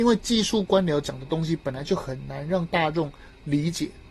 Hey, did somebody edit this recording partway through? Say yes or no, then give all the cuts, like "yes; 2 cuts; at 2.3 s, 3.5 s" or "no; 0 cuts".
no; 0 cuts